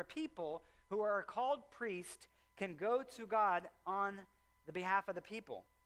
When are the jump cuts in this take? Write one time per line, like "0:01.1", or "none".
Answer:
none